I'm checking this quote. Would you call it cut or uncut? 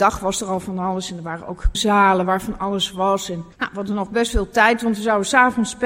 cut